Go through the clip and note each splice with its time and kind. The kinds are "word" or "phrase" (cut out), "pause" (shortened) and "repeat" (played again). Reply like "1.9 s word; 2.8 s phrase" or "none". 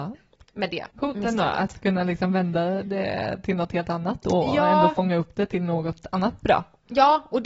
0.9 s pause